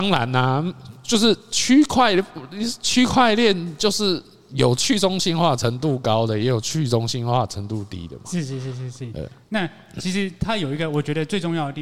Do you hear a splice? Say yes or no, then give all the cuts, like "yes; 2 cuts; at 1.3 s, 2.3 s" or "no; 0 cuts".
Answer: no; 0 cuts